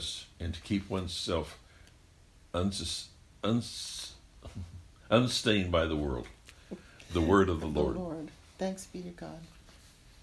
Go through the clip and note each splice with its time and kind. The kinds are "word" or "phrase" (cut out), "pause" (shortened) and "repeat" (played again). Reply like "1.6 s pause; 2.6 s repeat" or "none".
none